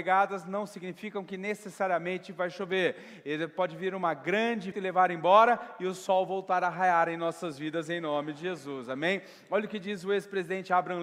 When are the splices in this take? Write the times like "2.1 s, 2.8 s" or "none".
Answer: 4.7 s